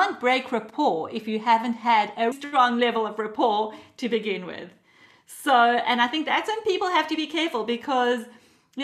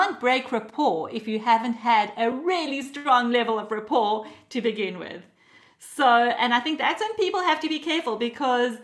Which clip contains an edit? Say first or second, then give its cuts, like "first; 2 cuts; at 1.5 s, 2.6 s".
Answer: first; 1 cut; at 2.3 s